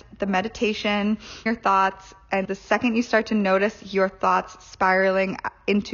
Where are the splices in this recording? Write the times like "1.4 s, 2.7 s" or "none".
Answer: 1.5 s, 2.4 s